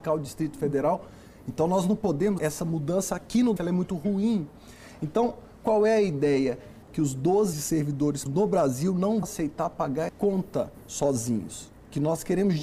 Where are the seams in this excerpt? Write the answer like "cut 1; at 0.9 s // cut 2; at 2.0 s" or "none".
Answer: cut 1; at 2.4 s // cut 2; at 3.6 s // cut 3; at 6.8 s // cut 4; at 7.5 s // cut 5; at 8.3 s // cut 6; at 9.2 s // cut 7; at 10.1 s